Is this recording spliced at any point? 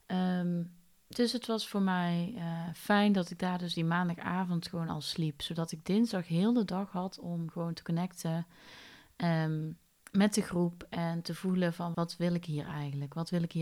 yes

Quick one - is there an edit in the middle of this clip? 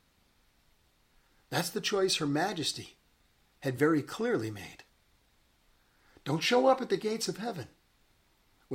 no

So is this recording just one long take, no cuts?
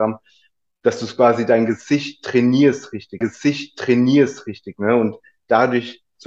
no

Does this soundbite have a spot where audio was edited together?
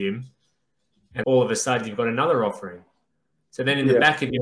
yes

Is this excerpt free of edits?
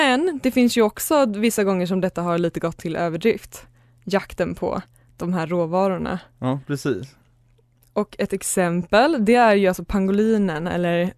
yes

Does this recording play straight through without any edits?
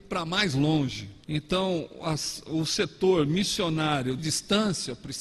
no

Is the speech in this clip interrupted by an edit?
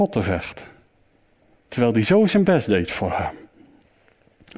no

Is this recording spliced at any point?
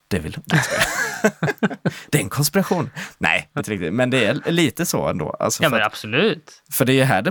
yes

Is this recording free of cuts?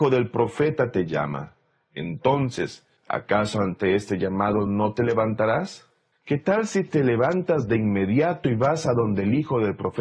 yes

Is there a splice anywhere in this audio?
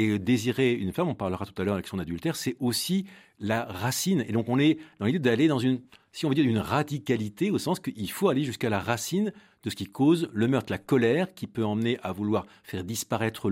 no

